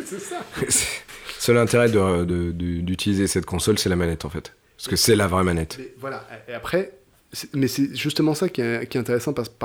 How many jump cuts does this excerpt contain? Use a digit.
0